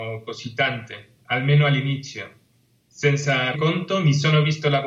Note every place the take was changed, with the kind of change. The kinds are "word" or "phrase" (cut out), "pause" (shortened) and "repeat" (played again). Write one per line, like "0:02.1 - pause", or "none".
0:03.5 - word